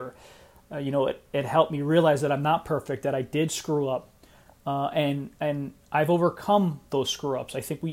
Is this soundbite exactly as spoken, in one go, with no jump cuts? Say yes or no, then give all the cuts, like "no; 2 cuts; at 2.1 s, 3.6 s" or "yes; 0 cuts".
yes; 0 cuts